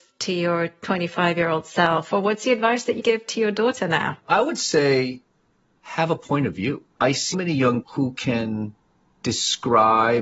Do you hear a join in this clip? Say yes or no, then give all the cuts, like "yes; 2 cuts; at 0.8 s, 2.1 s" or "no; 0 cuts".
yes; 5 cuts; at 3.0 s, 4.2 s, 6.9 s, 7.3 s, 7.8 s